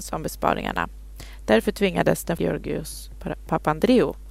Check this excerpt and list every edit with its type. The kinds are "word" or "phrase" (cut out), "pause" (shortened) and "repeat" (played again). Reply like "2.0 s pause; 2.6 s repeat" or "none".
2.4 s phrase